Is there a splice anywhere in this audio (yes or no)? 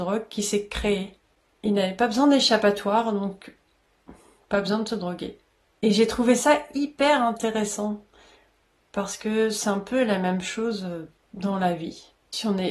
no